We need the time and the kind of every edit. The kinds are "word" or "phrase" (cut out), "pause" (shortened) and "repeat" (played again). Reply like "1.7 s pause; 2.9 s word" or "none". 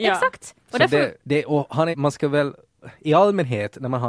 1.2 s pause; 1.9 s word